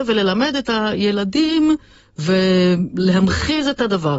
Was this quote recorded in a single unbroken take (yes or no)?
yes